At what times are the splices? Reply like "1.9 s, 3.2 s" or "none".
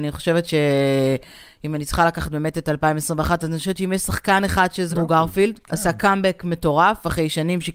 4.9 s